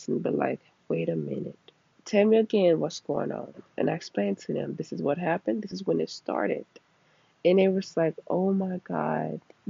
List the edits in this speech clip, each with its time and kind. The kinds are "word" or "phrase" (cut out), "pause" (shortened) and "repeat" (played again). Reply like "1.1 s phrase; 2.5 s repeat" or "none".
1.9 s pause